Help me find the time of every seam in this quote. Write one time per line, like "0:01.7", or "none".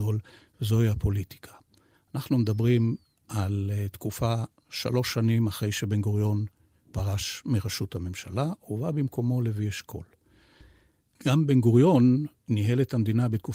none